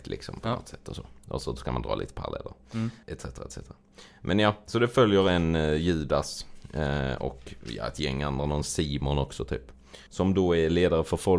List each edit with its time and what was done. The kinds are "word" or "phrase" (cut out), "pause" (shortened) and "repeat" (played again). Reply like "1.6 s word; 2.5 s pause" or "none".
3.0 s pause; 10.1 s pause